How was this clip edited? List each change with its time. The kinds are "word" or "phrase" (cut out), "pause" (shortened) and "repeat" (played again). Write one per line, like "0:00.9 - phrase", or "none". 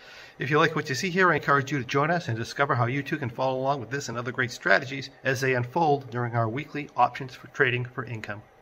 none